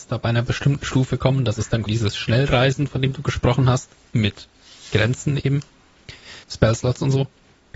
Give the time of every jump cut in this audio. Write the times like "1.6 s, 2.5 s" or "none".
1.9 s, 6.4 s